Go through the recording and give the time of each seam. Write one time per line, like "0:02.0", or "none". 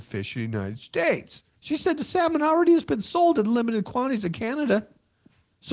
0:01.5